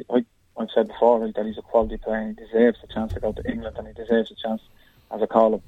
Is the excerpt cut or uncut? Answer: uncut